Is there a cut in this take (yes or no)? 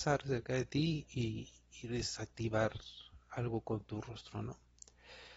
no